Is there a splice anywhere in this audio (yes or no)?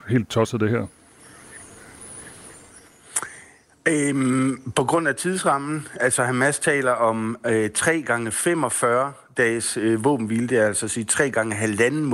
no